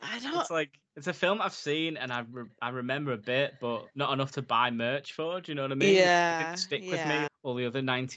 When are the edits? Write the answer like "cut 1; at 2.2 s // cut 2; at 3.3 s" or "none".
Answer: cut 1; at 3.9 s // cut 2; at 7.3 s

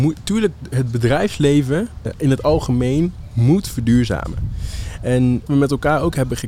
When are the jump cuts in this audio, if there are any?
cut 1; at 2.1 s // cut 2; at 5.5 s

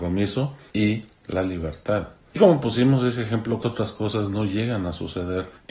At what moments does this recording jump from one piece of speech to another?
cut 1; at 2.4 s // cut 2; at 3.6 s

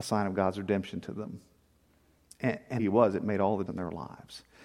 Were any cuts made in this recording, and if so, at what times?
cut 1; at 2.8 s // cut 2; at 3.7 s

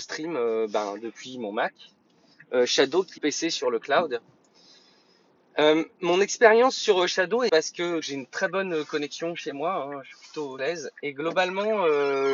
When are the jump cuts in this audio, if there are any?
cut 1; at 3.2 s // cut 2; at 7.5 s // cut 3; at 8.0 s // cut 4; at 10.6 s

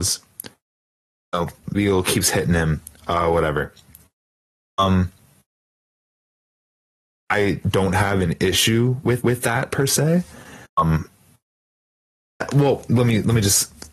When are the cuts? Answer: cut 1; at 1.7 s // cut 2; at 7.1 s // cut 3; at 9.2 s // cut 4; at 10.7 s

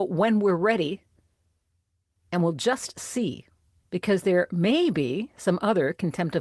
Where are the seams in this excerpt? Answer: none

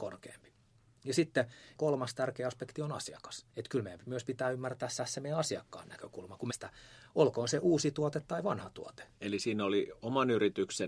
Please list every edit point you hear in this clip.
cut 1; at 3.5 s // cut 2; at 5.0 s // cut 3; at 6.5 s // cut 4; at 9.1 s

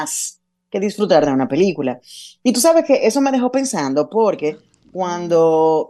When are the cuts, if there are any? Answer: none

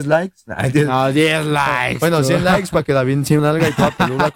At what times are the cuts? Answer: cut 1; at 3.4 s

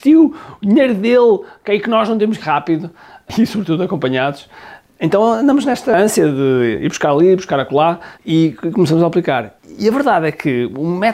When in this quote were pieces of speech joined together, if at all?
cut 1; at 2.4 s // cut 2; at 8.1 s

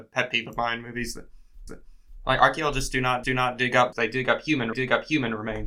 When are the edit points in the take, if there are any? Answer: cut 1; at 1.7 s // cut 2; at 3.2 s // cut 3; at 3.9 s // cut 4; at 4.7 s

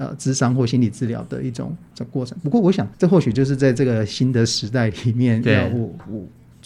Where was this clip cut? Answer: cut 1; at 2.9 s

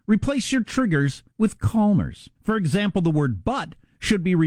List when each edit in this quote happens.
cut 1; at 1.3 s // cut 2; at 2.4 s

